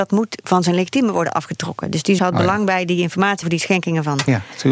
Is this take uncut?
no; 2 cuts; at 2.2 s, 3.4 s

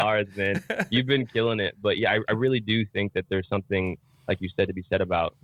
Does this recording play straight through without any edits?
yes; 0 cuts

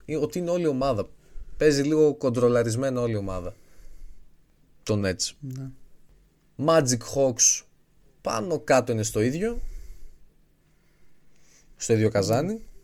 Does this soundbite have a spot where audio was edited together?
no; 0 cuts

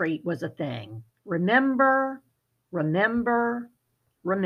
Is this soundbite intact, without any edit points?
no; 1 cut; at 1.1 s

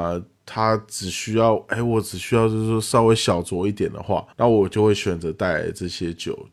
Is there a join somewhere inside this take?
yes; 1 cut; at 4.3 s

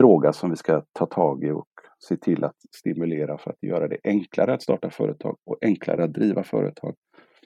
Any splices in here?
no; 0 cuts

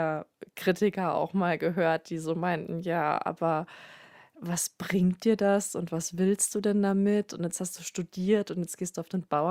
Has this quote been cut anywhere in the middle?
no; 0 cuts

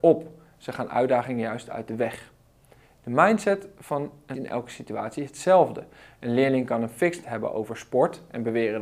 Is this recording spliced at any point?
yes; 2 cuts; at 4.3 s, 7.2 s

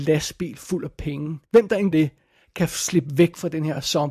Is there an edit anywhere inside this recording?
yes; 2 cuts; at 1.4 s, 1.9 s

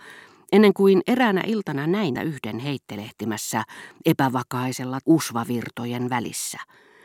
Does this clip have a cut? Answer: yes; 2 cuts; at 2.2 s, 5.0 s

